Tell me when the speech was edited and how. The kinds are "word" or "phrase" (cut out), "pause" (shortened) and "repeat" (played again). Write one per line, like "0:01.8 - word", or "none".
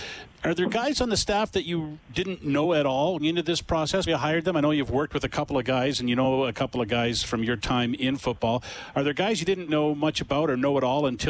0:03.2 - word
0:04.1 - word
0:09.7 - word